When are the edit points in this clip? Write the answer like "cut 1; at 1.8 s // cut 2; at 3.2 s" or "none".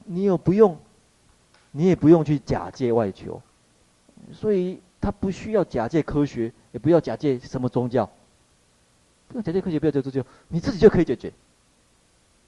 none